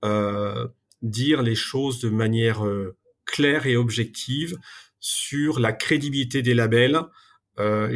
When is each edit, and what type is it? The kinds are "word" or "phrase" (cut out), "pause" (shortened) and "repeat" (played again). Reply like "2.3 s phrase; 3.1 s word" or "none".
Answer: none